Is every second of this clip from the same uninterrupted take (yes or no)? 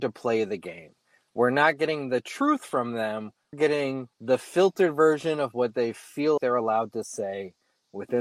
no